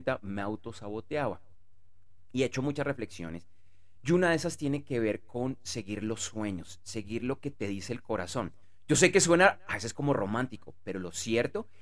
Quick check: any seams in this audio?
no; 0 cuts

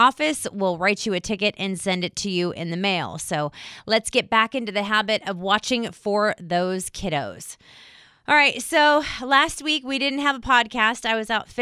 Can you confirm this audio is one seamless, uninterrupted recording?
yes; 0 cuts

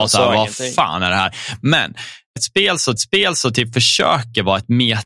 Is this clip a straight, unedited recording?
no; 2 cuts; at 2.4 s, 3.0 s

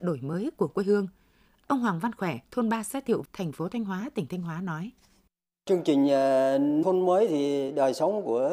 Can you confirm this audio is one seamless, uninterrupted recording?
no; 3 cuts; at 2.4 s, 3.2 s, 6.8 s

